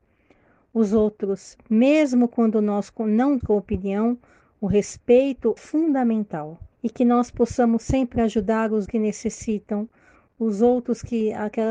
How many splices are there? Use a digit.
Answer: 4